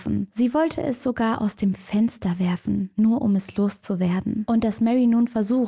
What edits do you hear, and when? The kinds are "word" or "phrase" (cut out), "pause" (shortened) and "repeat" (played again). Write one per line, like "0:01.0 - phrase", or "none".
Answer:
none